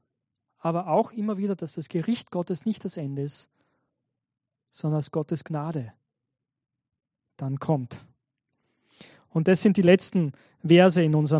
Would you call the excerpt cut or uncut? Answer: uncut